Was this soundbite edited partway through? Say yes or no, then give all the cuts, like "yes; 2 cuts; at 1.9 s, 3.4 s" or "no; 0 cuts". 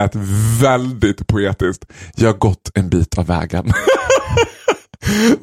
no; 0 cuts